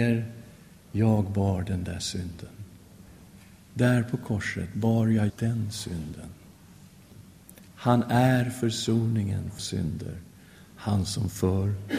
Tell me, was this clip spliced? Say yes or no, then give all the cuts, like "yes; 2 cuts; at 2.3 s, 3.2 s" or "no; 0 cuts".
yes; 2 cuts; at 5.3 s, 9.6 s